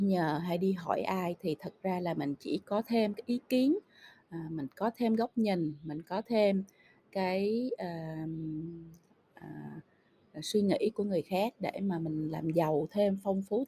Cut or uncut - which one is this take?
uncut